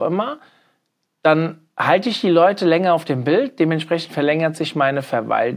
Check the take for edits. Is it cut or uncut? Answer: uncut